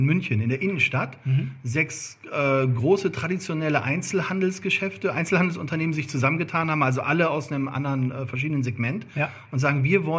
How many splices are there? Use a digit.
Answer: 0